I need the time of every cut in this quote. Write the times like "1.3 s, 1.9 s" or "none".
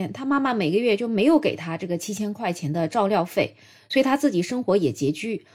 none